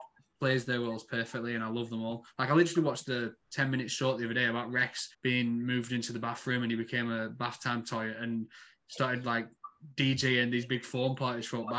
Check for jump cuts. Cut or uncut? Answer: cut